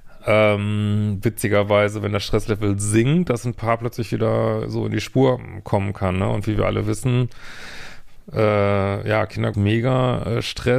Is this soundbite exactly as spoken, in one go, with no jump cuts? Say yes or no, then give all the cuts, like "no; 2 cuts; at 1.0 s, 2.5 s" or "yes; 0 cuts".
no; 1 cut; at 9.5 s